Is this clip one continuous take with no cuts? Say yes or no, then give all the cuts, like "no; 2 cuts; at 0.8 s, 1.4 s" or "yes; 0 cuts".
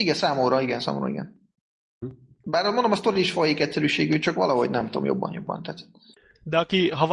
yes; 0 cuts